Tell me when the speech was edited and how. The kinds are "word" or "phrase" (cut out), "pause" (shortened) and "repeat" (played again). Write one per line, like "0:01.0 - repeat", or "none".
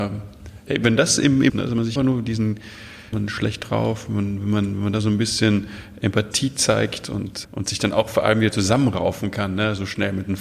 0:01.5 - phrase
0:02.0 - word
0:03.1 - phrase
0:07.0 - word
0:07.4 - word